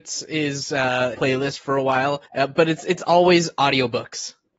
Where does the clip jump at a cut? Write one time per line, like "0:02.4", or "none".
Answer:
0:01.1
0:02.2

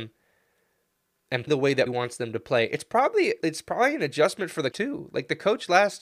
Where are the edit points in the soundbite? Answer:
0:01.5
0:01.9
0:03.4
0:04.7

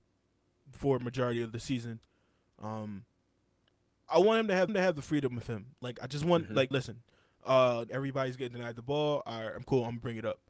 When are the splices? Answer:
0:04.1
0:04.7
0:05.7
0:06.7
0:07.9

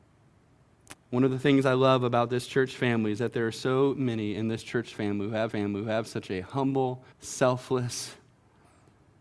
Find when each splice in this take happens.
0:05.5
0:07.1

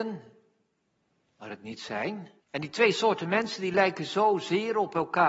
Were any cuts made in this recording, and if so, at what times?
0:02.4

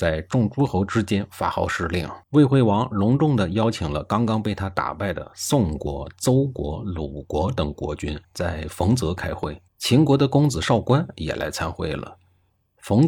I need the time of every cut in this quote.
0:02.2
0:08.2
0:09.7

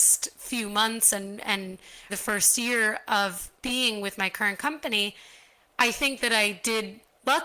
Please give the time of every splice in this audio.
0:02.1
0:03.6

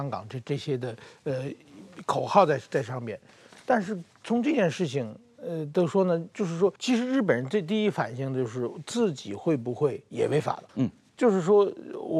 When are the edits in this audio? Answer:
0:06.8
0:10.7

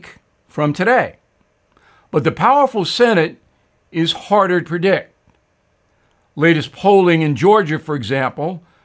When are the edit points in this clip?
0:04.6

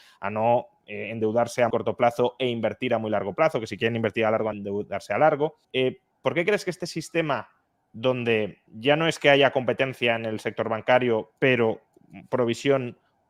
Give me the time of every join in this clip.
0:01.7
0:04.5
0:05.6
0:08.7
0:11.4

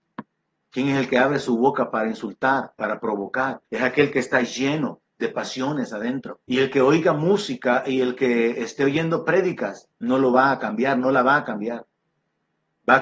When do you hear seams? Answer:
0:02.7
0:03.6
0:06.4
0:09.9

